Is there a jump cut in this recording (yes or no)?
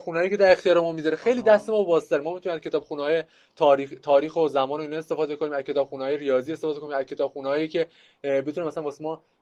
no